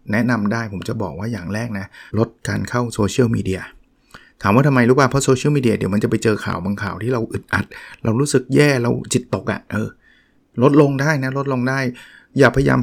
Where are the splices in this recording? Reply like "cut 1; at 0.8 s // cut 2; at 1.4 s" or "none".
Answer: cut 1; at 2.1 s